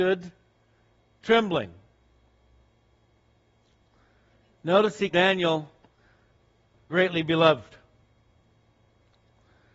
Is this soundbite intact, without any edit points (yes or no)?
no